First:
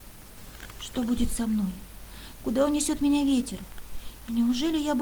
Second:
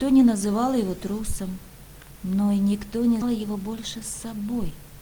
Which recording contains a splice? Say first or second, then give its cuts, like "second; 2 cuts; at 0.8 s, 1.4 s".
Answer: second; 1 cut; at 3.2 s